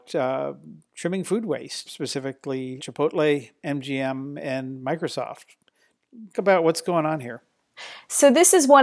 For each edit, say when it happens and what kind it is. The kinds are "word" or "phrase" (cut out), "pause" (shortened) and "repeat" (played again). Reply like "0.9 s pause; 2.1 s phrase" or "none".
1.9 s word; 2.8 s word; 6.3 s word